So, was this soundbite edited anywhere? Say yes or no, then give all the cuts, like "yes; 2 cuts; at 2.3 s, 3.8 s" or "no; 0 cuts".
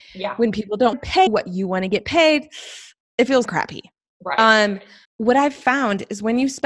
yes; 5 cuts; at 0.9 s, 1.3 s, 3.0 s, 3.5 s, 5.0 s